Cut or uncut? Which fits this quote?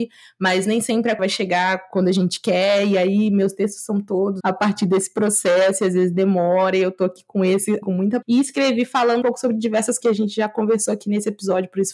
cut